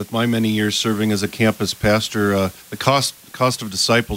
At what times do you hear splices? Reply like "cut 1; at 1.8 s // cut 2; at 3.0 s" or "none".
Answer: cut 1; at 2.6 s